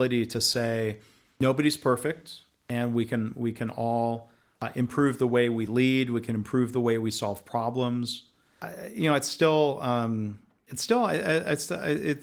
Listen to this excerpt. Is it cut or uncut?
uncut